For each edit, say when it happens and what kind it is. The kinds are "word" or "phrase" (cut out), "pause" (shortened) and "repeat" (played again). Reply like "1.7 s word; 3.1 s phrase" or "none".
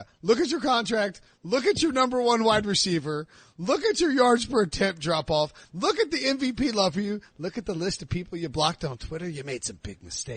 none

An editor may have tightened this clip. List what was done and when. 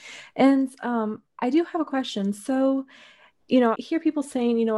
3.7 s word

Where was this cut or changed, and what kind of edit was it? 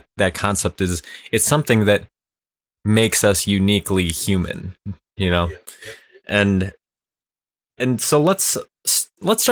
none

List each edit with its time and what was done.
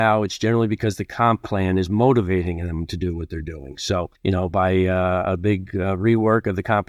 4.2 s pause

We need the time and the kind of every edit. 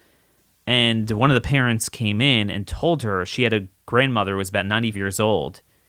4.9 s word

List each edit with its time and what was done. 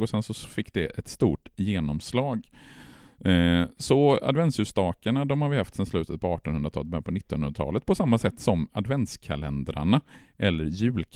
1.0 s word

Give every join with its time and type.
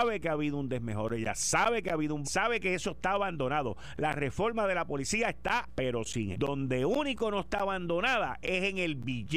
2.2 s phrase; 5.7 s word; 6.3 s word

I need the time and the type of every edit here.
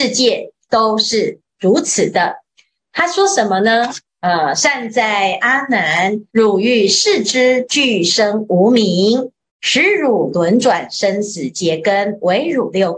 6.3 s pause

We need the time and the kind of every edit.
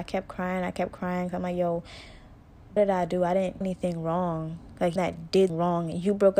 2.8 s word; 3.6 s word; 5.0 s phrase; 5.5 s word

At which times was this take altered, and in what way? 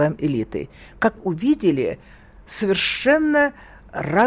1.2 s word

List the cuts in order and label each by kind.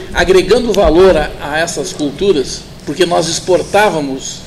none

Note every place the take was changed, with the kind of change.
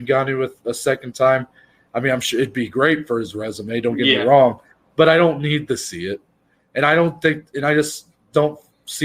none

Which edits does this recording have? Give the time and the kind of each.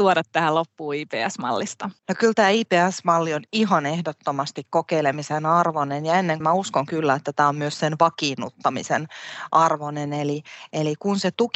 2.0 s pause; 6.4 s word

